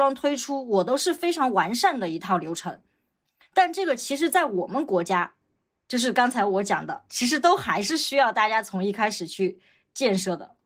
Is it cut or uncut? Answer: uncut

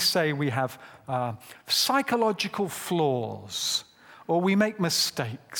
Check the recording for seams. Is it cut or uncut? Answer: uncut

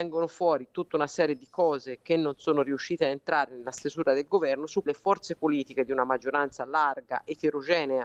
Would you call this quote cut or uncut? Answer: cut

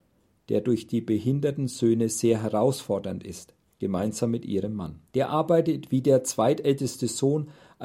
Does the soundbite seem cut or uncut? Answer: cut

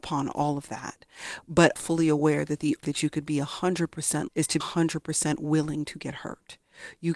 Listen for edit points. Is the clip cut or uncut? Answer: cut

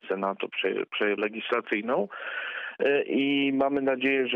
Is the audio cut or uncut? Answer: cut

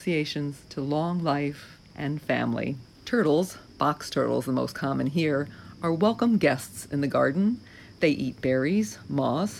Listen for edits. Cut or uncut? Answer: cut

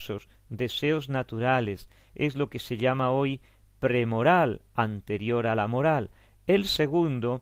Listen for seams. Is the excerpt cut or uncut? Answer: uncut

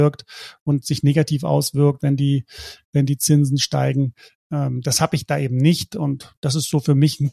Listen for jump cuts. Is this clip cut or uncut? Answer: uncut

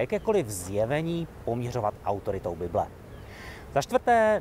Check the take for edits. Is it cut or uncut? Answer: uncut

